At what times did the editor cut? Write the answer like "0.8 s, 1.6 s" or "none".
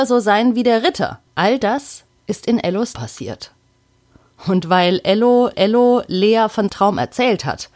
1.3 s, 2.1 s, 2.9 s, 5.5 s, 6.7 s